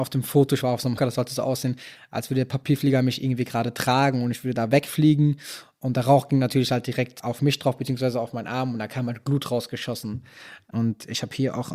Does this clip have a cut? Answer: yes; 1 cut; at 1.0 s

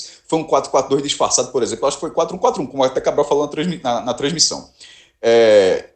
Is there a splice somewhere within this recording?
no; 0 cuts

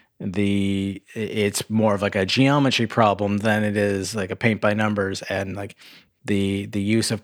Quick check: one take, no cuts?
yes; 0 cuts

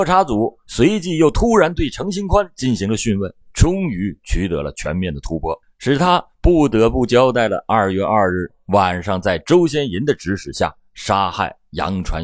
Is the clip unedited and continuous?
no; 2 cuts; at 3.4 s, 5.6 s

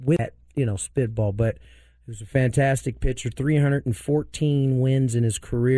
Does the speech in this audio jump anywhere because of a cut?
no; 0 cuts

